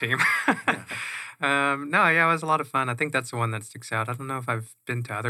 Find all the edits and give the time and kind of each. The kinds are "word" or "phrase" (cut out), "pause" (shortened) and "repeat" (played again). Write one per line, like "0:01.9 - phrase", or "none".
none